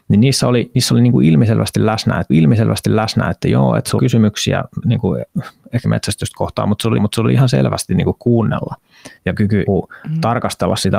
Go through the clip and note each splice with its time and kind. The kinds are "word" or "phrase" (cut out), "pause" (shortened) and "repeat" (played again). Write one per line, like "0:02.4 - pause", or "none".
0:02.3 - repeat
0:04.0 - word
0:04.8 - word
0:05.8 - word
0:07.0 - repeat
0:08.2 - word
0:09.2 - pause
0:09.7 - word